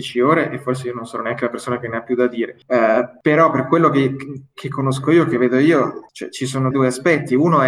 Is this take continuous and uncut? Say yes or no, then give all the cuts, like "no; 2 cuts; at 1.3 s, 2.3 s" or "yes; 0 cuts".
no; 1 cut; at 6.7 s